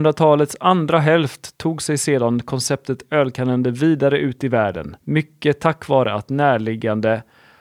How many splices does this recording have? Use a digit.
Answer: 1